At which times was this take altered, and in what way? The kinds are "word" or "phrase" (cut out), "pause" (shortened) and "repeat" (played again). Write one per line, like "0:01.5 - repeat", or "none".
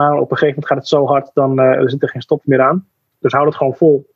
none